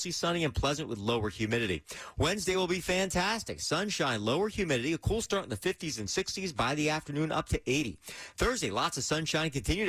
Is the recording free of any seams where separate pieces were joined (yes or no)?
yes